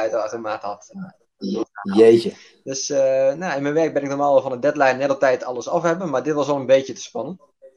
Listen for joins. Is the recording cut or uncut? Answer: uncut